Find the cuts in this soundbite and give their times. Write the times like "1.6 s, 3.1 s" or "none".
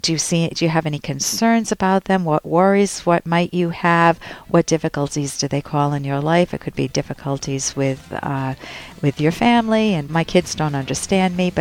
10.1 s